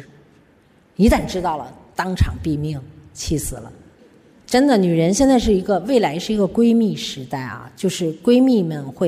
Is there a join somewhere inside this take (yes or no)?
yes